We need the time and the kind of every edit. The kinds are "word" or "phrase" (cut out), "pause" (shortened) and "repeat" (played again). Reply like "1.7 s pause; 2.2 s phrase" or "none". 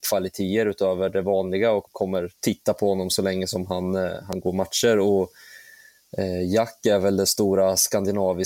1.9 s word; 2.3 s pause